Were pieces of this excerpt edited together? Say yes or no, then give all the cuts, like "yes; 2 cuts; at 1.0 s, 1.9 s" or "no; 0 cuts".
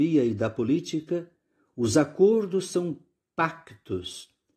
no; 0 cuts